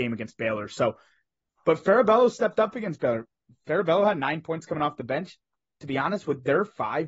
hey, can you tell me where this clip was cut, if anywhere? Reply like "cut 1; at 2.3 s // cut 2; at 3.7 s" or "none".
none